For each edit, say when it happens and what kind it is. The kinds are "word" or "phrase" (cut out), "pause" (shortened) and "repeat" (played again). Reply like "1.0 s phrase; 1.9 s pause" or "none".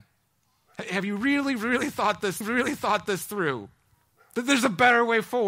2.4 s repeat